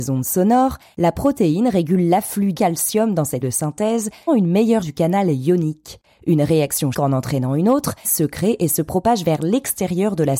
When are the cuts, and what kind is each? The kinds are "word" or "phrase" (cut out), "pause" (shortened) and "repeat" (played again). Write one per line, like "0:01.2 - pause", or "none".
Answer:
0:02.5 - word
0:03.4 - word
0:04.3 - word
0:04.8 - word
0:06.9 - word
0:08.0 - word